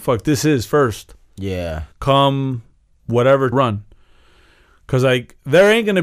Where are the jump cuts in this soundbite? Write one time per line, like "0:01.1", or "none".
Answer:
0:01.9
0:03.5